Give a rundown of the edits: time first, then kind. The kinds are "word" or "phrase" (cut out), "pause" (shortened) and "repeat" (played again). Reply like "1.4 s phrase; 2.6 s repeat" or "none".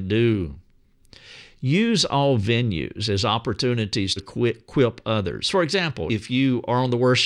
4.2 s word; 6.1 s word

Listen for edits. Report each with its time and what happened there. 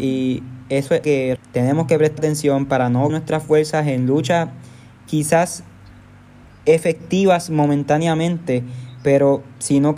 1.0 s word; 1.4 s word; 2.2 s word; 3.1 s word

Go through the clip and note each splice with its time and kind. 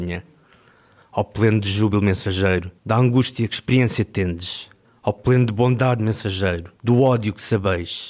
2.8 s pause; 4.8 s pause; 6.8 s pause

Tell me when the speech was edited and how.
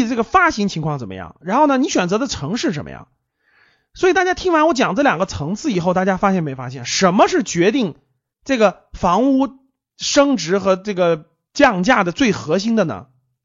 none

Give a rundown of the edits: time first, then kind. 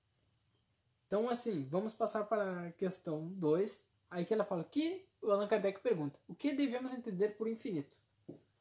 3.9 s pause

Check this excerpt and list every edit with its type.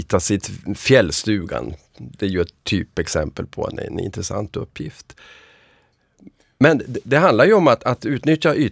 none

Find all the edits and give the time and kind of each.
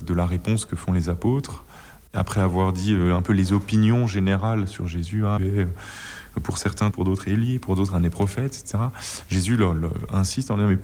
5.4 s phrase; 6.9 s phrase

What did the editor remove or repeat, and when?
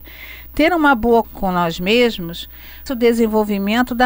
1.2 s word; 2.9 s word

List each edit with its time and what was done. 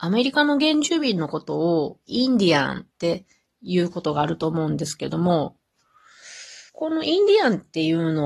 2.9 s pause; 6.7 s pause

